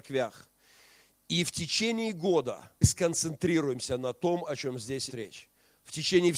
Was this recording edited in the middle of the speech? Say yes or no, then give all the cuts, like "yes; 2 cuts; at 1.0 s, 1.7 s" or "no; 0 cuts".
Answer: yes; 2 cuts; at 2.8 s, 5.1 s